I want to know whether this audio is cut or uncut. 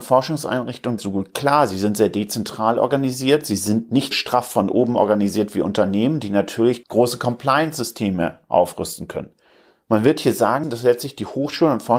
cut